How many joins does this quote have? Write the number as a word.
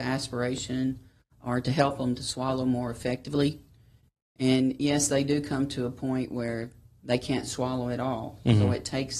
zero